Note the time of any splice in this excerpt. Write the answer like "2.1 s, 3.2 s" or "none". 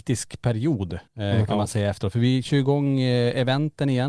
1.1 s